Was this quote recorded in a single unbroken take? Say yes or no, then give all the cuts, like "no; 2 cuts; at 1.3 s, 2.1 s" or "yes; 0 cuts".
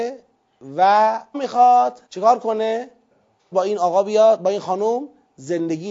no; 3 cuts; at 1.3 s, 2.1 s, 3.5 s